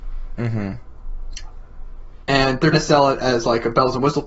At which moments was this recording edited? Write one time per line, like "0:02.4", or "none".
0:02.7

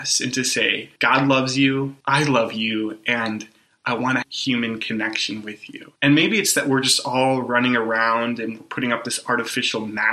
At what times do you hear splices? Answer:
0:01.0
0:02.0
0:04.2
0:06.0

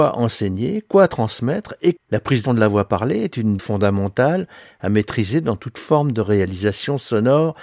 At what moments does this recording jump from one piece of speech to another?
0:02.0
0:02.5
0:03.6

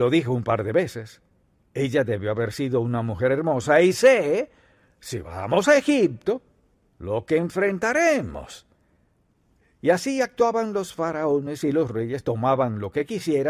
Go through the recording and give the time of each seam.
none

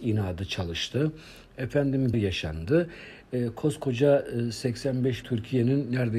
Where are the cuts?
0:02.1
0:05.2

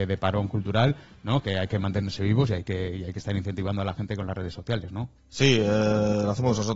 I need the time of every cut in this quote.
0:05.2

